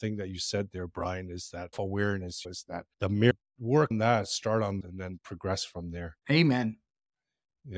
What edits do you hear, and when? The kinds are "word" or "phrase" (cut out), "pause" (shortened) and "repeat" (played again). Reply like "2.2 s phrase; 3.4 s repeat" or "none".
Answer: 1.7 s word; 2.9 s pause; 3.9 s word; 4.8 s word; 6.2 s pause